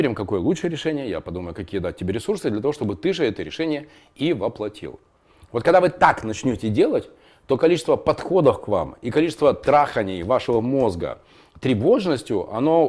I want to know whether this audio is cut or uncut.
uncut